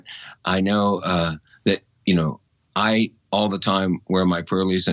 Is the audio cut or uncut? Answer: uncut